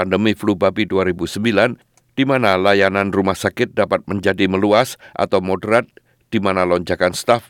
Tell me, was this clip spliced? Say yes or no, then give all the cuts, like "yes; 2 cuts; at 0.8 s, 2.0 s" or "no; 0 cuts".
no; 0 cuts